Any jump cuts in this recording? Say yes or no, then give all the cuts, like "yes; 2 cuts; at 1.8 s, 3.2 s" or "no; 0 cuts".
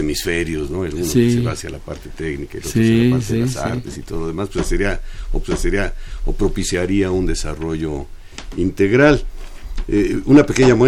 yes; 1 cut; at 5.4 s